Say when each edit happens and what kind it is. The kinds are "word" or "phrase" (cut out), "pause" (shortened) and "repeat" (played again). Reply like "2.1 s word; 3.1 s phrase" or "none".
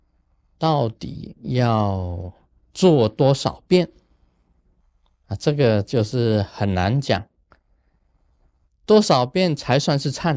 none